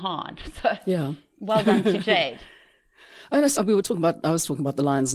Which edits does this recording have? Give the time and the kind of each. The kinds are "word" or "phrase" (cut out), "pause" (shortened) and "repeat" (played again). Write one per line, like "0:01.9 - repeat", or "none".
0:03.6 - word